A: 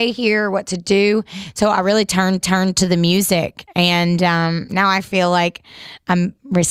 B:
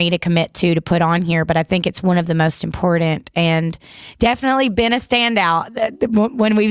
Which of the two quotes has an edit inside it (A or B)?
A